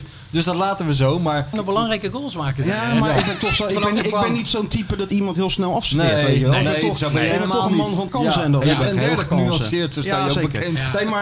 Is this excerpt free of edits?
no; 3 cuts; at 1.5 s, 8.1 s, 8.6 s

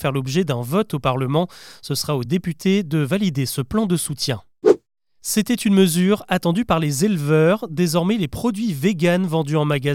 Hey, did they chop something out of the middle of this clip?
no; 0 cuts

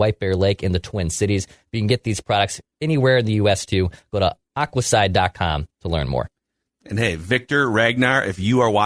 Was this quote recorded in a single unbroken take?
yes; 0 cuts

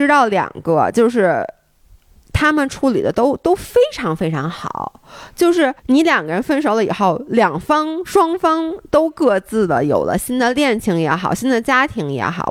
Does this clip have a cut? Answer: yes; 1 cut; at 5.8 s

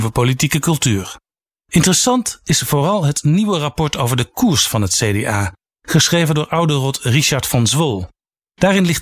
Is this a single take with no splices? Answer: yes; 0 cuts

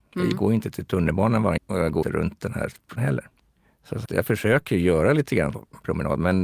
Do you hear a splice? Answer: yes; 5 cuts; at 1.6 s, 2.0 s, 3.0 s, 4.1 s, 5.5 s

